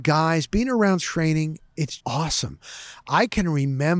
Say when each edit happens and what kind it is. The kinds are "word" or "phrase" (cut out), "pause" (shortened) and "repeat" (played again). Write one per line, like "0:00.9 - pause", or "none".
0:01.0 - word
0:02.0 - word